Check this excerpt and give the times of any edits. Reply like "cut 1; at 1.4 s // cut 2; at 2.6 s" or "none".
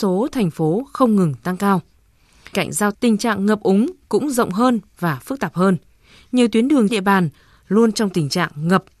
cut 1; at 2.5 s // cut 2; at 2.9 s // cut 3; at 6.9 s